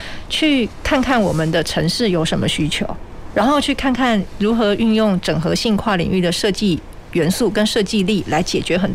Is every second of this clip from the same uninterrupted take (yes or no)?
yes